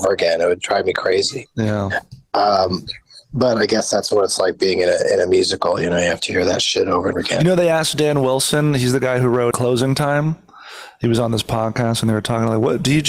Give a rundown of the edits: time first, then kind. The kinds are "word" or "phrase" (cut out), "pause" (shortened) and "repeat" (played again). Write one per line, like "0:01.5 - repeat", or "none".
0:04.1 - word
0:07.1 - word
0:09.5 - word